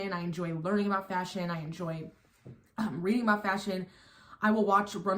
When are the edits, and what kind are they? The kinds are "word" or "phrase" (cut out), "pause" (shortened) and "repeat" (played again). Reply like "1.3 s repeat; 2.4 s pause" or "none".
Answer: none